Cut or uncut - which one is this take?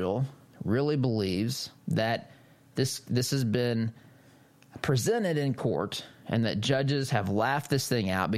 cut